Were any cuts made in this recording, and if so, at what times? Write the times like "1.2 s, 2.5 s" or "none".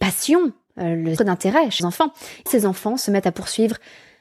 1.2 s, 1.8 s, 2.5 s